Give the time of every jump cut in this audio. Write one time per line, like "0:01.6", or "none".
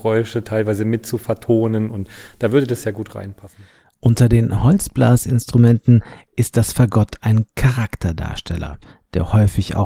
none

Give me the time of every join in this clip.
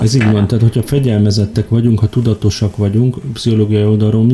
none

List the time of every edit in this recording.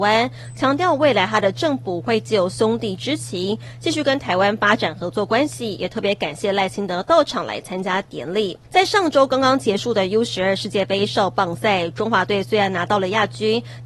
0:08.6

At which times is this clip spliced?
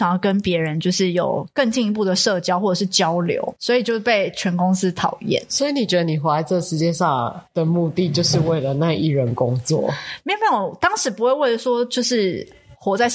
0:07.5

